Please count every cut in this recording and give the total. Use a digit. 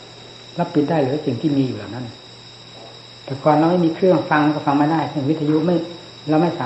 0